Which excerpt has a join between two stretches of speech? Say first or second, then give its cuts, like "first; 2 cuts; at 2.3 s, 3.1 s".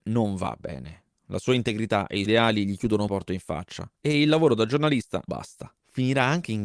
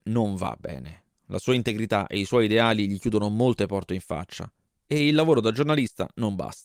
first; 4 cuts; at 2.3 s, 3.1 s, 4.0 s, 5.3 s